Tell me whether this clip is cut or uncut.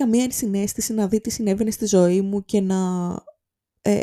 uncut